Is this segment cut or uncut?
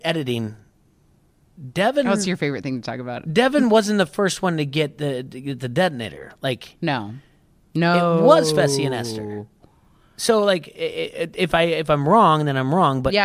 uncut